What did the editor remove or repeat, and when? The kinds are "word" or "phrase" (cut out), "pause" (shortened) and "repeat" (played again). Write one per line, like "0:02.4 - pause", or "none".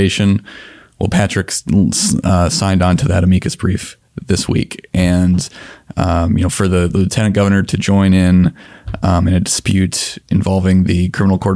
none